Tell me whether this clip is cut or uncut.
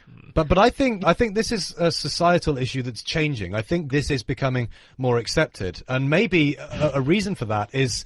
cut